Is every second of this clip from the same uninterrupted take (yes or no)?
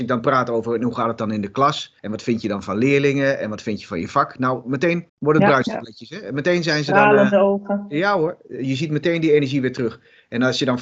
no